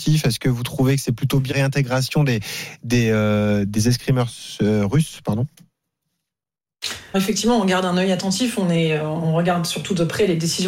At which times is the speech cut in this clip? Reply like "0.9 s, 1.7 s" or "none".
1.5 s, 7.1 s

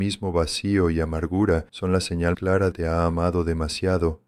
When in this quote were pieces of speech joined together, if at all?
1.7 s, 2.3 s, 2.7 s

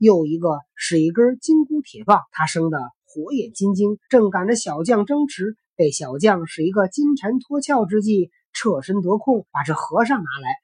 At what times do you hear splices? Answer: 2.3 s, 4.0 s, 9.5 s

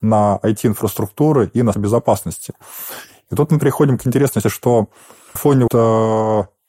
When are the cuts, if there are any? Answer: 1.7 s, 4.4 s, 5.4 s, 5.7 s

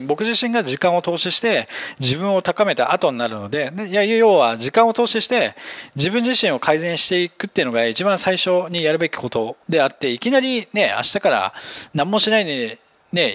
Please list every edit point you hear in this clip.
9.6 s

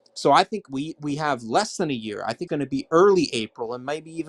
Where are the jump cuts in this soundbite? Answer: 2.5 s

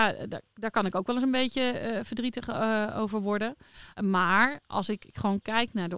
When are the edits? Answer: 3.9 s

